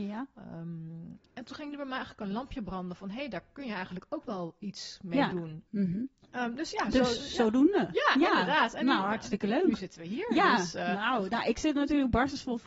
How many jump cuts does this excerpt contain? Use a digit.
1